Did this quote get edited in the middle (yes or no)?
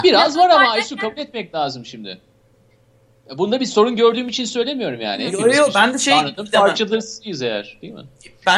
no